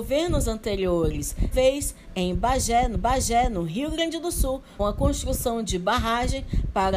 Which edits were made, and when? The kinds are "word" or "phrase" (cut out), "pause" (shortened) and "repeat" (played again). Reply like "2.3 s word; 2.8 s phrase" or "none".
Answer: 1.5 s word; 2.9 s repeat; 4.8 s word